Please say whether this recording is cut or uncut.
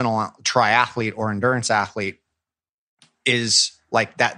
uncut